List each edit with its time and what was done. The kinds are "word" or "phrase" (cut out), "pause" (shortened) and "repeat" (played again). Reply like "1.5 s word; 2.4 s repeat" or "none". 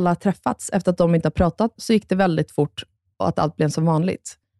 1.8 s phrase